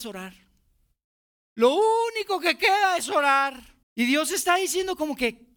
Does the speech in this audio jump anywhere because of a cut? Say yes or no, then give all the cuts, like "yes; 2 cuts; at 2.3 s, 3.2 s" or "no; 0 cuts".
yes; 1 cut; at 3.8 s